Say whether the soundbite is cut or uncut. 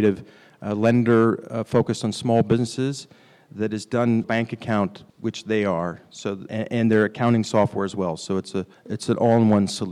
cut